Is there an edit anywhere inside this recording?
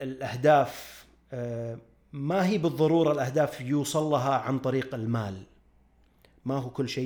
no; 0 cuts

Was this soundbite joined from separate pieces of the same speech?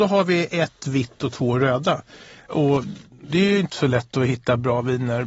no; 0 cuts

